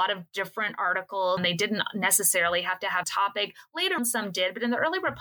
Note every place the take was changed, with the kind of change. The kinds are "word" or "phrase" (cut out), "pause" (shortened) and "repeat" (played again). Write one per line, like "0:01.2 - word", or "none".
0:01.4 - word
0:03.0 - phrase
0:04.0 - word